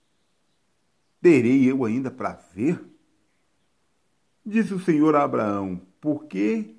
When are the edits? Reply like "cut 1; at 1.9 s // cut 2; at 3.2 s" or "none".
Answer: none

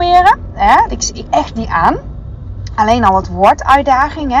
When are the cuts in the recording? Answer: cut 1; at 1.3 s // cut 2; at 1.7 s

